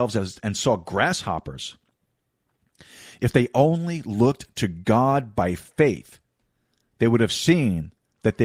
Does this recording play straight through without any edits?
yes; 0 cuts

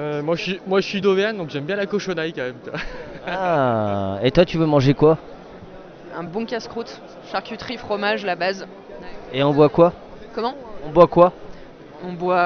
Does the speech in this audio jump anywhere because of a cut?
no; 0 cuts

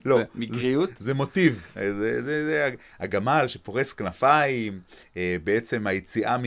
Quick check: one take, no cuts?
yes; 0 cuts

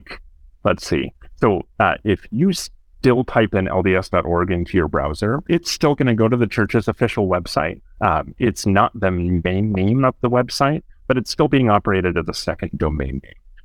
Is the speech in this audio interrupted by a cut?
no; 0 cuts

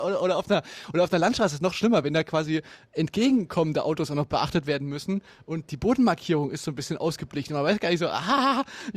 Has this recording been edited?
no; 0 cuts

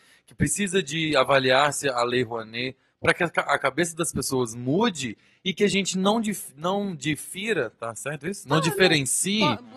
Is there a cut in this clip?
no; 0 cuts

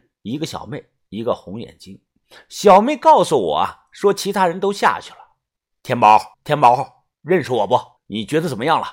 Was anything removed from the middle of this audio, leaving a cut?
yes; 4 cuts; at 5.6 s, 6.3 s, 7.1 s, 8.0 s

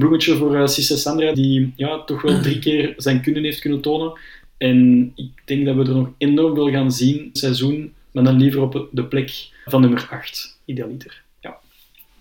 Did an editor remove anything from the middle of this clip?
yes; 3 cuts; at 1.3 s, 7.4 s, 9.7 s

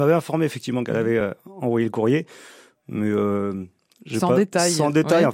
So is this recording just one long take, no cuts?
yes; 0 cuts

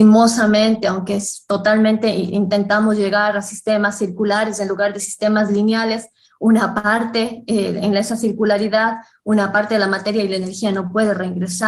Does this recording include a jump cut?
no; 0 cuts

